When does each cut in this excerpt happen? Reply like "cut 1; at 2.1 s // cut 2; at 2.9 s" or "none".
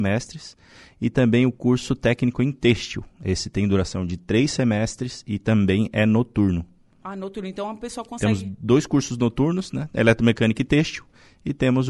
none